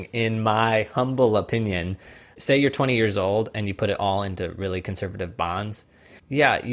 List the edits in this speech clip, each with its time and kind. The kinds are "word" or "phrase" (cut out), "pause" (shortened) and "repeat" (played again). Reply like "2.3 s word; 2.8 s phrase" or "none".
none